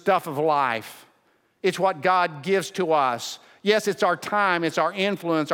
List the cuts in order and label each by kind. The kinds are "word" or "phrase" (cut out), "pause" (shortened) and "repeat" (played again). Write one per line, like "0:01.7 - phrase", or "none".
none

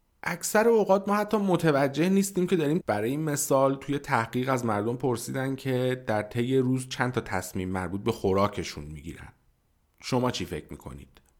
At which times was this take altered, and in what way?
0:02.8 - phrase

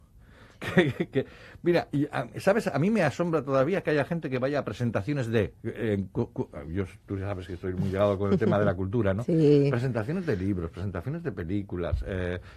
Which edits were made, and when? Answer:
0:05.6 - pause

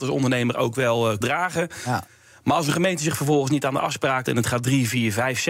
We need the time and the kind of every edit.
0:01.2 - word
0:04.3 - word

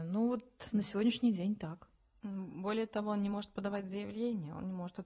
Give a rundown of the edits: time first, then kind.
none

